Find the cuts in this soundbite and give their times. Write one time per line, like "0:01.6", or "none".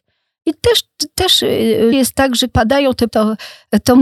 0:01.9
0:02.5
0:03.1